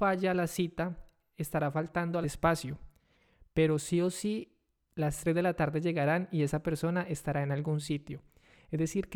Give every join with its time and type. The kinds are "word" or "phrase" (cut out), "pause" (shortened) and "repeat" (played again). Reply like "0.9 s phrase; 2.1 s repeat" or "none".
2.2 s phrase